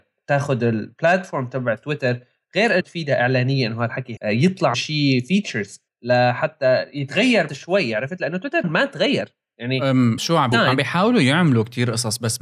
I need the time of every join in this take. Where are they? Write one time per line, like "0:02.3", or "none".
0:02.8
0:04.2
0:04.7
0:05.9
0:07.5
0:08.6
0:10.2
0:10.5